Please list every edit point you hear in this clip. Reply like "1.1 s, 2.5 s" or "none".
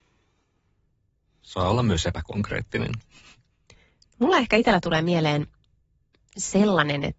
none